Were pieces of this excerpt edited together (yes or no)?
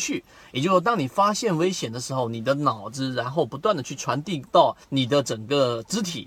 yes